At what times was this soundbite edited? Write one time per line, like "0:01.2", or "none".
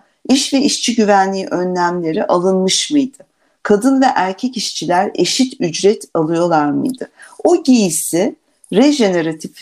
none